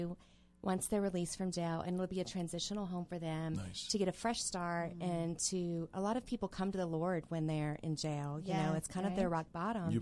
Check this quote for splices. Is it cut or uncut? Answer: uncut